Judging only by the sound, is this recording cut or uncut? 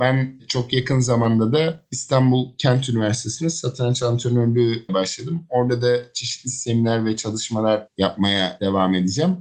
cut